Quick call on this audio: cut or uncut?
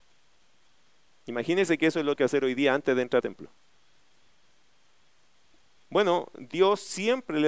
cut